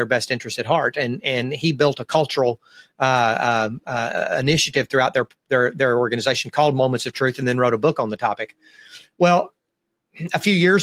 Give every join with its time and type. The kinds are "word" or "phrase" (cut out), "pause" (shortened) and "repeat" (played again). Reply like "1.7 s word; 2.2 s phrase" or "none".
none